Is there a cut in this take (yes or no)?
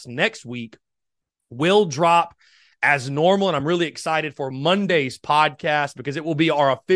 no